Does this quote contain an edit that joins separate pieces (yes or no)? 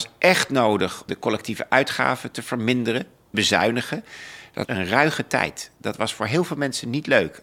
yes